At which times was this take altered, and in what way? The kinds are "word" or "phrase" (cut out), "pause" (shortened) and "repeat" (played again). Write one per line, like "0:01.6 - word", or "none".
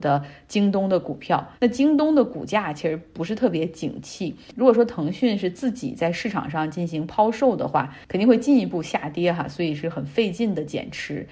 0:01.5 - pause